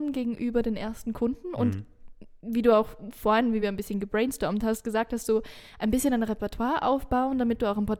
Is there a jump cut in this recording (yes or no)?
no